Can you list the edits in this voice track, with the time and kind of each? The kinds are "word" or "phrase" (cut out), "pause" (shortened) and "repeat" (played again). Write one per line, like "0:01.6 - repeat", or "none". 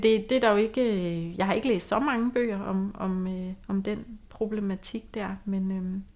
0:03.6 - pause